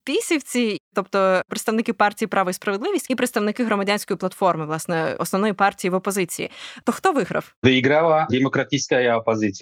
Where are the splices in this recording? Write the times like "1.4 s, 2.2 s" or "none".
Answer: 3.1 s